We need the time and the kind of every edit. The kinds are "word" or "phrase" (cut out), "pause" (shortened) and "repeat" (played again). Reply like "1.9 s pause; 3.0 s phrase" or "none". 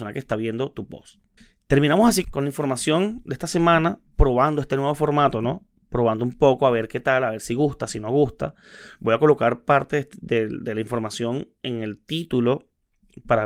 1.4 s pause; 2.2 s word